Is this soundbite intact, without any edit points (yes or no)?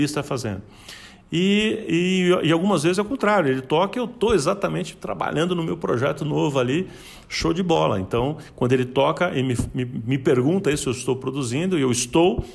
yes